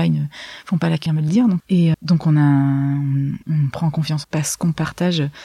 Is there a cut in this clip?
yes; 5 cuts; at 1.1 s, 1.6 s, 1.9 s, 3.4 s, 4.2 s

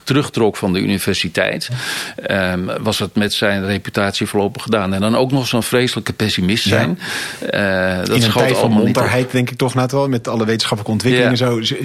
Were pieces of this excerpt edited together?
no; 0 cuts

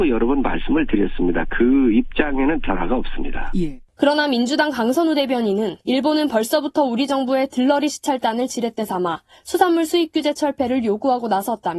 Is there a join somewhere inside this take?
yes; 2 cuts; at 3.9 s, 5.8 s

